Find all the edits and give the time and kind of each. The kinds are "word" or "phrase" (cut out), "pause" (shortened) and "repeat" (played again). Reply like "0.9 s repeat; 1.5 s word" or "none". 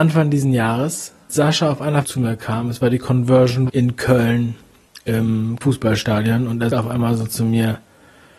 1.3 s word; 2.0 s word; 3.7 s word; 5.6 s word; 6.7 s word

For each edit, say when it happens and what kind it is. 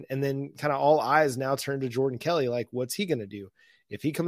none

